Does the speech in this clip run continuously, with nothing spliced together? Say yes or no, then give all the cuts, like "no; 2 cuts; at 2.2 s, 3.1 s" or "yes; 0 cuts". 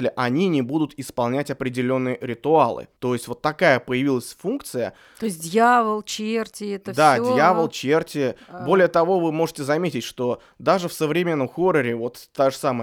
no; 1 cut; at 3.0 s